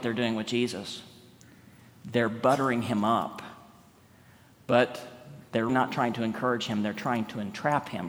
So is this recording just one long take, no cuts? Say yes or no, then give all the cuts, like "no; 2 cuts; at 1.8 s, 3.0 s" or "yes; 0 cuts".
no; 1 cut; at 5.7 s